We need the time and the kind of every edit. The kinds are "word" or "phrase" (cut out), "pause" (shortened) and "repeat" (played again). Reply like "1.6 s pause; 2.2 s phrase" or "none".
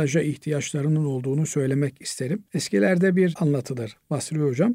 2.5 s pause; 3.3 s word